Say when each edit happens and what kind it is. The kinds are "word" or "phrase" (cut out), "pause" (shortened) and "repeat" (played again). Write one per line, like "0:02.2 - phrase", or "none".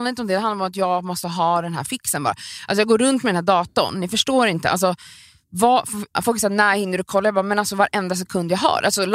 0:06.1 - pause